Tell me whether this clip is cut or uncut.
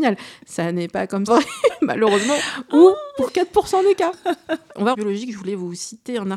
cut